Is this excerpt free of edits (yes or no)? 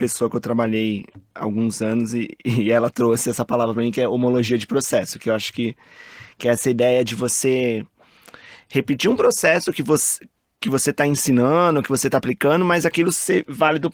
yes